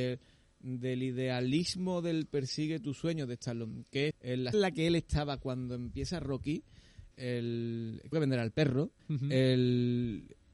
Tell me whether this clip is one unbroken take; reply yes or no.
no